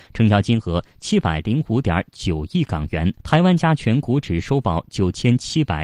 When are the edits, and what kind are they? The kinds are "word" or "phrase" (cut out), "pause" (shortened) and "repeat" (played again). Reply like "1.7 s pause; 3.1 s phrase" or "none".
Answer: 3.2 s pause